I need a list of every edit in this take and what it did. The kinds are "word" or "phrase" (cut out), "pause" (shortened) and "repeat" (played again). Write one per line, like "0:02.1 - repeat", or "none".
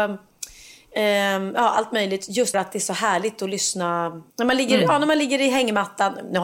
0:02.5 - word
0:04.3 - pause

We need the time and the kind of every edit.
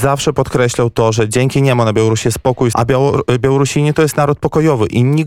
0:02.7 - word

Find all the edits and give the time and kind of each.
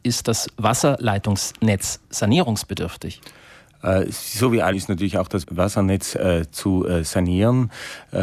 0:04.7 - word
0:05.4 - word

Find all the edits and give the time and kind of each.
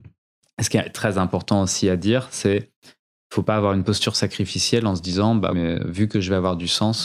0:05.5 - word

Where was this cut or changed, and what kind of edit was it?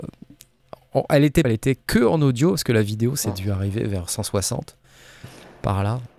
0:01.4 - phrase

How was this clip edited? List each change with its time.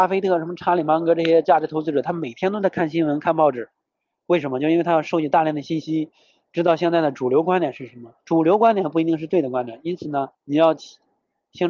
0:08.2 - pause
0:10.3 - pause

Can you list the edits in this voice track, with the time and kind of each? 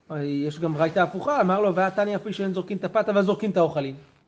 none

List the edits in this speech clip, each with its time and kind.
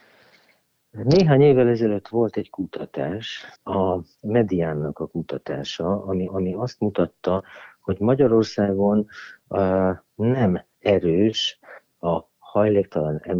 0:03.6 - pause
0:06.3 - repeat
0:10.7 - pause

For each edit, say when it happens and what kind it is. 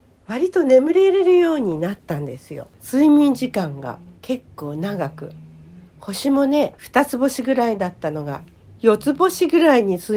0:04.2 - pause

